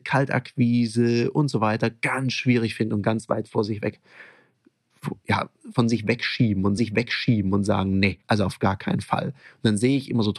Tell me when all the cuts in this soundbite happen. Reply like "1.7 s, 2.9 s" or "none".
6.8 s, 8.2 s